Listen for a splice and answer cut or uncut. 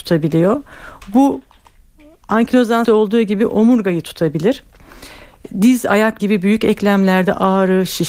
cut